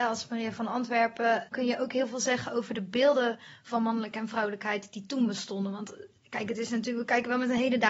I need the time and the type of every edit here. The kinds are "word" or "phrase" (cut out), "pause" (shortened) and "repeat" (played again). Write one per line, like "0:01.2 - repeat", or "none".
0:01.5 - word